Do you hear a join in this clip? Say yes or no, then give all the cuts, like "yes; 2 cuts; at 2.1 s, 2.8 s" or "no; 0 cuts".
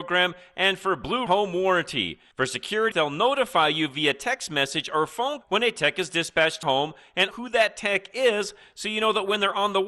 yes; 5 cuts; at 1.3 s, 2.9 s, 5.4 s, 6.6 s, 7.3 s